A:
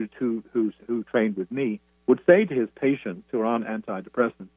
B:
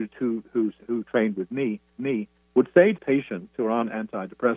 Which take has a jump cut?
B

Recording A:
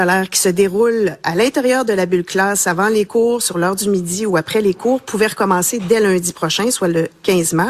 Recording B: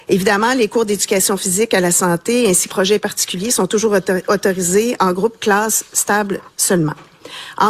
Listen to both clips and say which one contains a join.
B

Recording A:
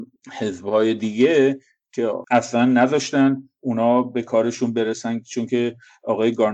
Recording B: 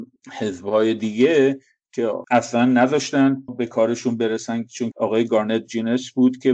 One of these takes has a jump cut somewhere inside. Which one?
B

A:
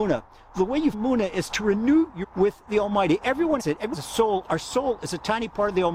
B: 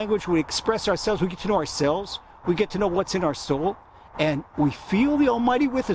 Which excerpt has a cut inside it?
A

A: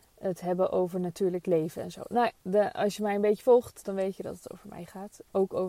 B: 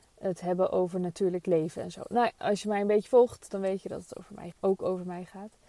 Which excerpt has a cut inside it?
B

